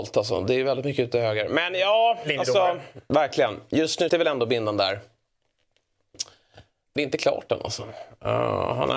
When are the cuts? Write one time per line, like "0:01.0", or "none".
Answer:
0:04.1
0:07.0